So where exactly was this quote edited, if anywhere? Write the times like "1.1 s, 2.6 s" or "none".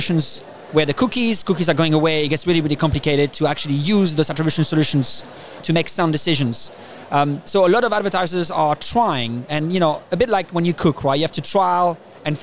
5.6 s